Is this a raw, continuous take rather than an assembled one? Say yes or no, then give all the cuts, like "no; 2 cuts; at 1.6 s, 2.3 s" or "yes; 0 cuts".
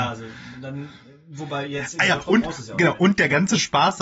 yes; 0 cuts